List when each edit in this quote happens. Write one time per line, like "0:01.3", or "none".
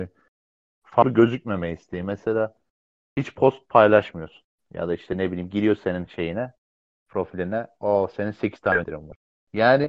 none